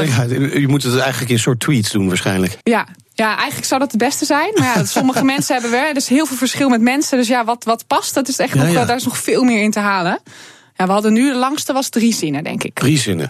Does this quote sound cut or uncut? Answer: cut